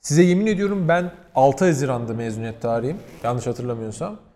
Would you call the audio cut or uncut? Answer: uncut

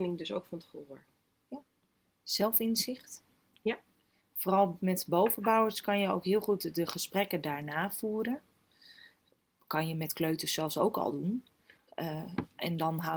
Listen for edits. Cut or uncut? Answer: uncut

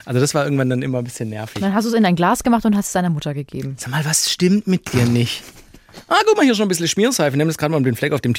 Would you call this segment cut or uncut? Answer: uncut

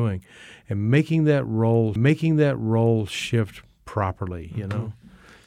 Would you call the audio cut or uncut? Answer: cut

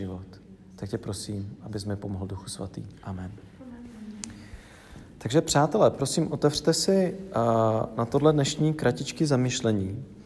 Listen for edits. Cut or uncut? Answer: uncut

